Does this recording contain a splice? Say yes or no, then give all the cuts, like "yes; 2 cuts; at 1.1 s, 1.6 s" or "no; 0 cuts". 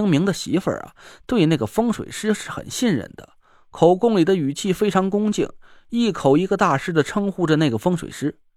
no; 0 cuts